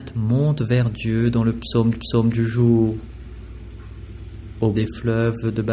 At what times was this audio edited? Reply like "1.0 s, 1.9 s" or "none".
1.9 s, 4.7 s